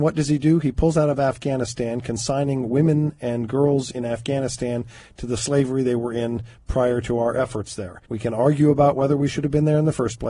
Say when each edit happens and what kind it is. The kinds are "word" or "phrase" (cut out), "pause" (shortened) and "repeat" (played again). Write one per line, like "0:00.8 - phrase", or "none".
0:08.1 - pause

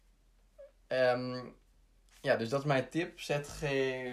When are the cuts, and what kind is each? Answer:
none

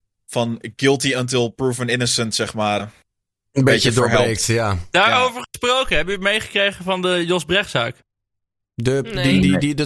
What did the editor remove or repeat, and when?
0:02.8 - word

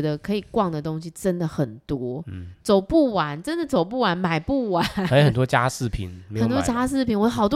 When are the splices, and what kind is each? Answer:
none

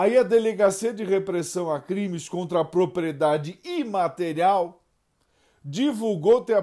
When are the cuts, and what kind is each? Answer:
none

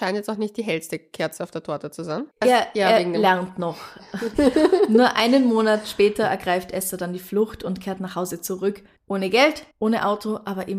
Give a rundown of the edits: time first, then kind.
0:02.3 - pause
0:09.7 - pause

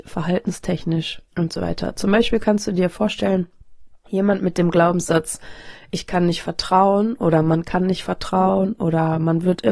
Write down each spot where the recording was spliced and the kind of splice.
0:01.3 - pause
0:04.1 - pause

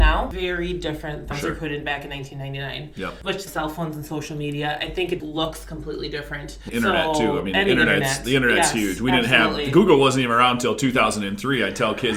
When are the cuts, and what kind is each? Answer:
0:01.3 - phrase
0:03.5 - phrase
0:05.2 - word
0:06.7 - word

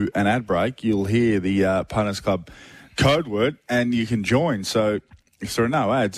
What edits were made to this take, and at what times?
none

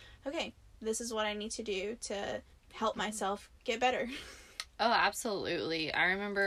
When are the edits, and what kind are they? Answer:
0:02.5 - pause
0:03.6 - pause

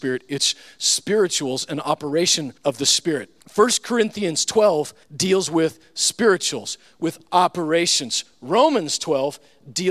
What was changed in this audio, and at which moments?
0:02.6 - pause
0:03.4 - pause
0:05.0 - pause

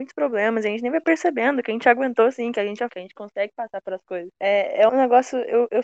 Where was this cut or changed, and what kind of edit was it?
0:02.9 - word
0:04.3 - pause
0:04.9 - word

